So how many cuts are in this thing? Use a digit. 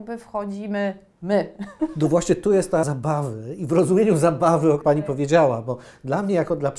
2